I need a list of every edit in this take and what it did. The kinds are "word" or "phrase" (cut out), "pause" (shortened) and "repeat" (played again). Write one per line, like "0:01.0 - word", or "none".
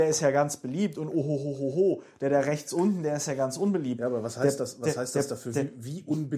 none